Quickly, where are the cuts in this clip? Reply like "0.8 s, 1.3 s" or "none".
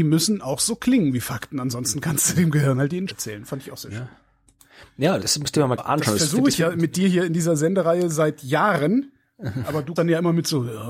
3.1 s, 5.2 s, 5.8 s, 10.0 s